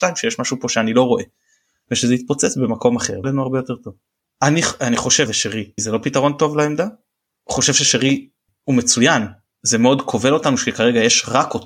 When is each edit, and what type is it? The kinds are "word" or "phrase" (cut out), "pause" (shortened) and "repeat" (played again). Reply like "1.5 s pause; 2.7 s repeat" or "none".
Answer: 3.2 s word; 5.3 s word; 5.8 s word; 9.5 s word